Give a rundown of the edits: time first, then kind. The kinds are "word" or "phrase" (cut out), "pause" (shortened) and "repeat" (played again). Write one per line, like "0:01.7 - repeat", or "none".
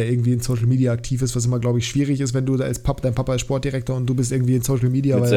none